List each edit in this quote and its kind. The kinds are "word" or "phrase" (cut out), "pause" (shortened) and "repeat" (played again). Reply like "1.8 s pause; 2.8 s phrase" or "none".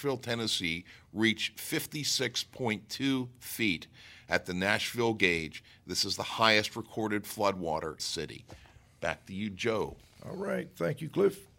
8.0 s phrase